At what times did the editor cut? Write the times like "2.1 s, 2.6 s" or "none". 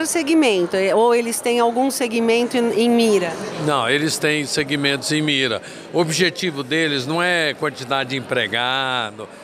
none